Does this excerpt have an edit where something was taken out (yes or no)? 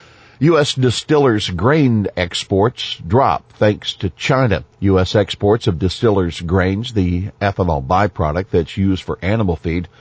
yes